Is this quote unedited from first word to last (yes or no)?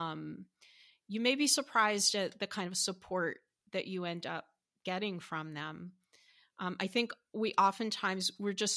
yes